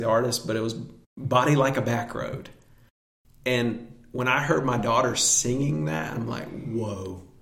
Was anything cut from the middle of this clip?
no; 0 cuts

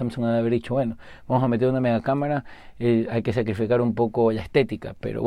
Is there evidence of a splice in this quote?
no; 0 cuts

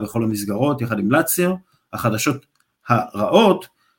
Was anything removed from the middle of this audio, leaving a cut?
no; 0 cuts

